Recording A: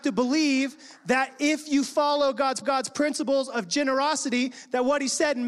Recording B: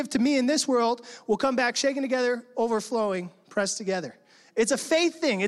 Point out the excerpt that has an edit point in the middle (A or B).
A